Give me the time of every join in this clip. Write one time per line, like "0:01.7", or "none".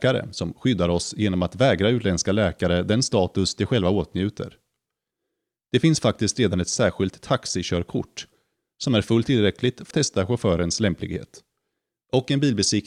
0:09.9